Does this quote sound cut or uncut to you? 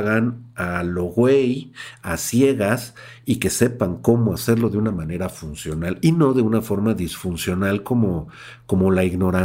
uncut